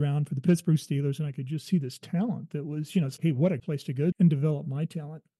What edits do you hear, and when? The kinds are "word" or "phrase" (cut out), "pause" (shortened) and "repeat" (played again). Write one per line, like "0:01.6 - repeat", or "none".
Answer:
0:03.2 - word
0:03.6 - word
0:04.1 - word